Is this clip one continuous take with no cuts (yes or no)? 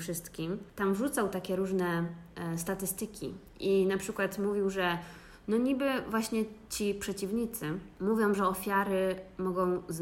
yes